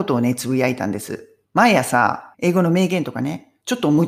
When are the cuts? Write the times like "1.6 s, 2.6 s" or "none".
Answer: 1.4 s, 2.3 s